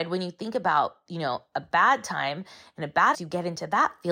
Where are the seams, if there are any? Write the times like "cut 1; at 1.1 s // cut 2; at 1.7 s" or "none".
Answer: cut 1; at 3.1 s